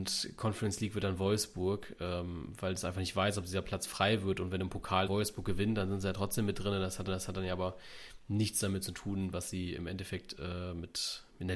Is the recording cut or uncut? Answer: cut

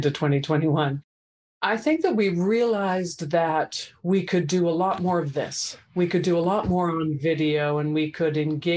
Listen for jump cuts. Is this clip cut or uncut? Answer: uncut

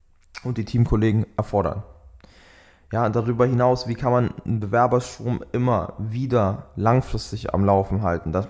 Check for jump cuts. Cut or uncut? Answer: uncut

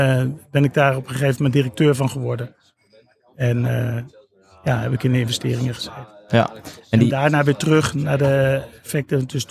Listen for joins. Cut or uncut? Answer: uncut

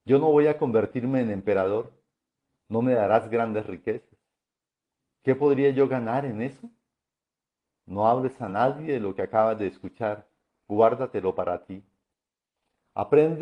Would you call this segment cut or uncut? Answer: uncut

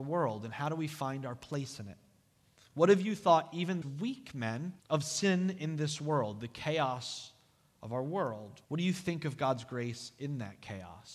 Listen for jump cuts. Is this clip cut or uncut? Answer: cut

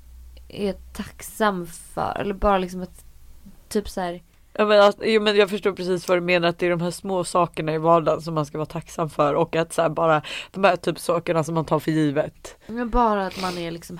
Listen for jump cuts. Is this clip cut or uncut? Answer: uncut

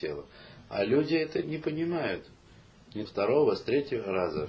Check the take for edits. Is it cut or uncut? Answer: cut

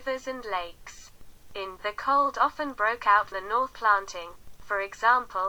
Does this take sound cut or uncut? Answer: cut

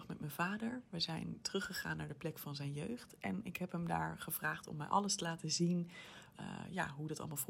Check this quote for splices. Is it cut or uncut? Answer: cut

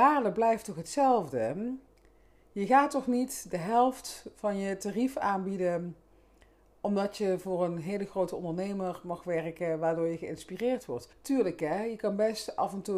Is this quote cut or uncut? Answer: cut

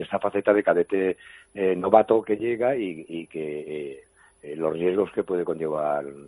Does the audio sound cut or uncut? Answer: uncut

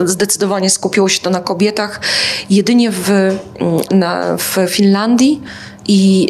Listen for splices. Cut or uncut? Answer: cut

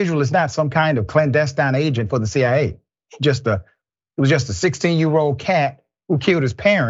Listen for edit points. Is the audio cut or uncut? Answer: uncut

